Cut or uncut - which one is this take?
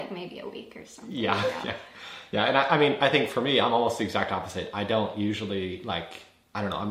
uncut